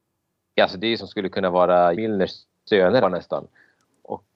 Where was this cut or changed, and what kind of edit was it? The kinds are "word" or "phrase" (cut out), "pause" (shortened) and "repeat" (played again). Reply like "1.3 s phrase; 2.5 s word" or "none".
1.0 s word; 1.9 s word; 3.0 s word